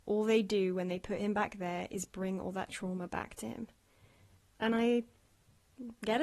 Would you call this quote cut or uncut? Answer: uncut